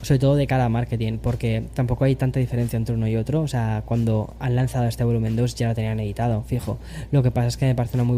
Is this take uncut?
yes; 0 cuts

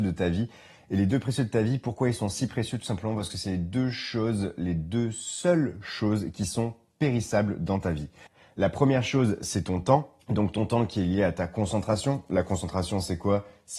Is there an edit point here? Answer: yes; 1 cut; at 10.2 s

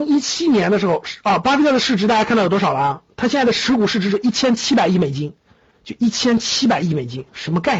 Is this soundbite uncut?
yes; 0 cuts

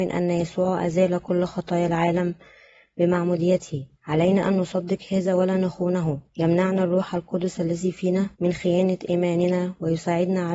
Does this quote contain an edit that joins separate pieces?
yes; 3 cuts; at 4.0 s, 6.3 s, 8.3 s

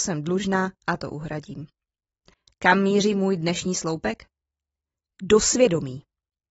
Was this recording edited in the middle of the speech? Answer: no; 0 cuts

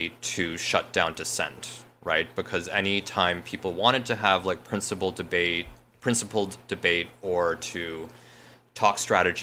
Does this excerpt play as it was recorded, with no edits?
yes; 0 cuts

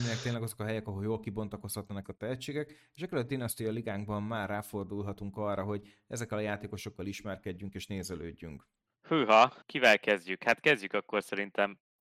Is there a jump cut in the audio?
yes; 2 cuts; at 2.0 s, 9.6 s

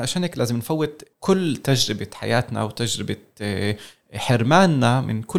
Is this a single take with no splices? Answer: no; 1 cut; at 1.1 s

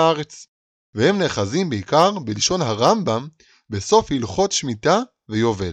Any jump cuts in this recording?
no; 0 cuts

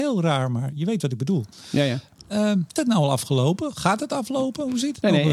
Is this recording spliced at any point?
yes; 1 cut; at 2.8 s

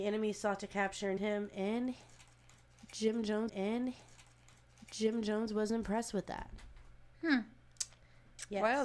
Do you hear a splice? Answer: yes; 3 cuts; at 1.2 s, 3.5 s, 7.1 s

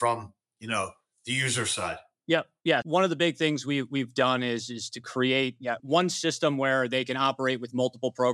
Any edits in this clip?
yes; 2 cuts; at 2.8 s, 5.8 s

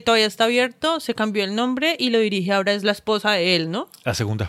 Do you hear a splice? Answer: no; 0 cuts

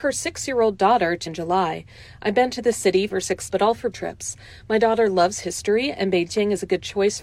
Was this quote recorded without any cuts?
no; 4 cuts; at 1.3 s, 3.1 s, 3.5 s, 3.9 s

